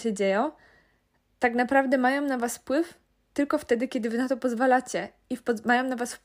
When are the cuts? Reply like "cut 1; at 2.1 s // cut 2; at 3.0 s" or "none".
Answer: none